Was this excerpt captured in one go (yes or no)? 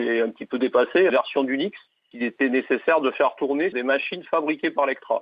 no